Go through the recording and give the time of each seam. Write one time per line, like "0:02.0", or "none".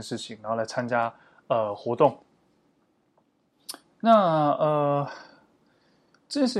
none